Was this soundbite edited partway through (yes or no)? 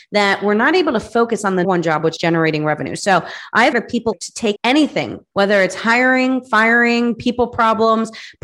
yes